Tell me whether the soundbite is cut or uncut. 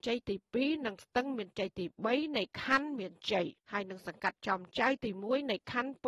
cut